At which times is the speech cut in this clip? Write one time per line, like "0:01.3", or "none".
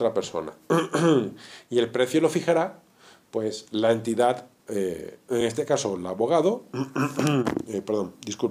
none